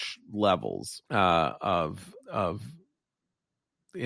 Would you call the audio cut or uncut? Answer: cut